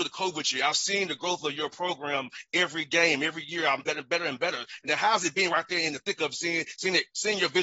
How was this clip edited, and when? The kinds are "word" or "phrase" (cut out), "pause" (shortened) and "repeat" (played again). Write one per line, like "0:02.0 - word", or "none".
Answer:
0:03.8 - phrase